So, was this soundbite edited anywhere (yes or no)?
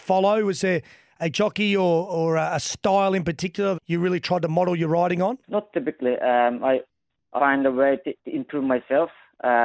yes